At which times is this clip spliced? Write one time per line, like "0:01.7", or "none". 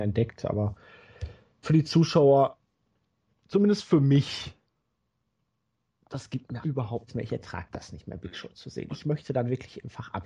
0:01.6
0:06.6
0:07.1